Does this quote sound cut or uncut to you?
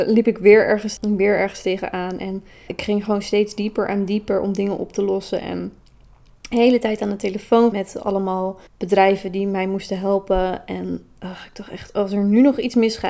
cut